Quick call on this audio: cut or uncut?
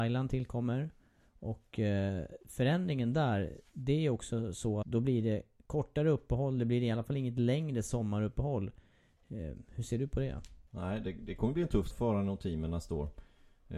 cut